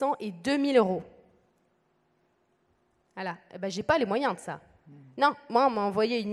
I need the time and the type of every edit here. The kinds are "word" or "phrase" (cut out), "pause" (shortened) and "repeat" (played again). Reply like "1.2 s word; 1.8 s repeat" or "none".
none